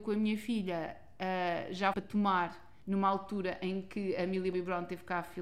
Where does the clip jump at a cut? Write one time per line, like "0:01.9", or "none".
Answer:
0:01.9
0:02.8
0:04.5